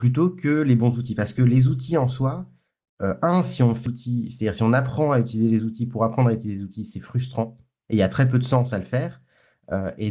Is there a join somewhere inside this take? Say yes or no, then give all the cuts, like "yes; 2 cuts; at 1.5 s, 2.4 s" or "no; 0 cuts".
yes; 1 cut; at 3.9 s